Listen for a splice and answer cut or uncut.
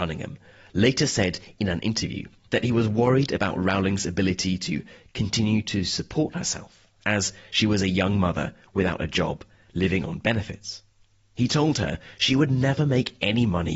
uncut